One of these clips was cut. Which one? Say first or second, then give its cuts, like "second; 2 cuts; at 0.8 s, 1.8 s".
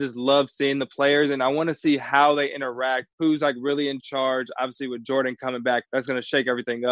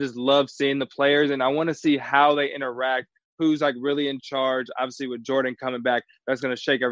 first; 2 cuts; at 3.1 s, 5.9 s